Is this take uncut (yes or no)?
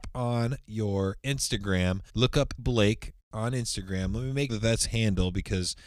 no